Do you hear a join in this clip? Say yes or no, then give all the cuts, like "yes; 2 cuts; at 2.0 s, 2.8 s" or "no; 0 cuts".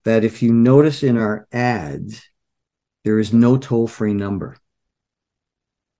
no; 0 cuts